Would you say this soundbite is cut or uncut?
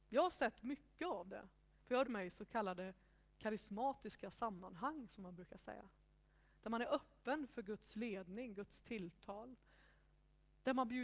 cut